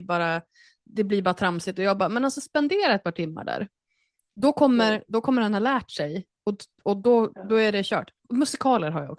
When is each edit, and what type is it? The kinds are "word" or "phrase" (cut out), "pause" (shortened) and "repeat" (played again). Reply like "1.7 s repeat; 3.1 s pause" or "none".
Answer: none